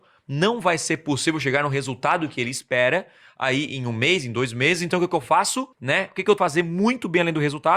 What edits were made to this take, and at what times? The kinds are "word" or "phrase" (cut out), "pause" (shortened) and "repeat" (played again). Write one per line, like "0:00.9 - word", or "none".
0:05.7 - pause
0:06.4 - phrase